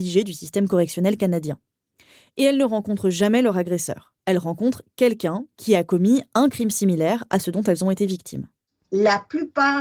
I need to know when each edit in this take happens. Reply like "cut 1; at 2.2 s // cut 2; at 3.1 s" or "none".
cut 1; at 4.2 s